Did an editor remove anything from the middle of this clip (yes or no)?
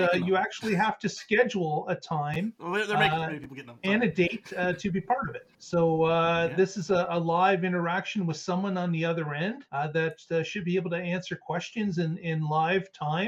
yes